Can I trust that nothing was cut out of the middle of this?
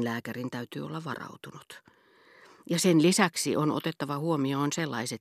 yes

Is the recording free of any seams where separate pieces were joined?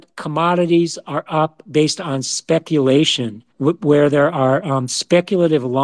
no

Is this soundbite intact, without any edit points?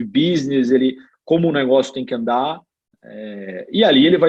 no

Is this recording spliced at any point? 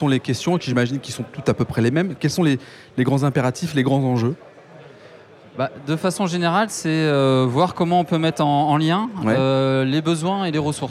no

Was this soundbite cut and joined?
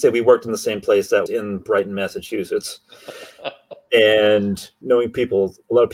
yes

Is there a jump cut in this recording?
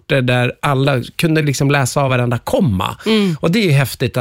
no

